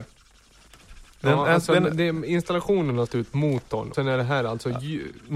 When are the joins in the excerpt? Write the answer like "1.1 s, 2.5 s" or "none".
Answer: 1.1 s, 3.1 s, 3.9 s